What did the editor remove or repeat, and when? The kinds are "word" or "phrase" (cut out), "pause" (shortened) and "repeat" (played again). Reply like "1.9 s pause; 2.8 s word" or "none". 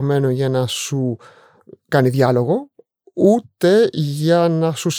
none